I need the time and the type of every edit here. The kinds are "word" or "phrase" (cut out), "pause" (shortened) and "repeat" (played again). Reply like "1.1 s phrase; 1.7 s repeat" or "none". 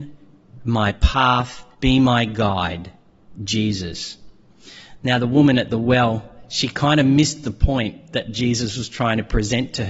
1.7 s pause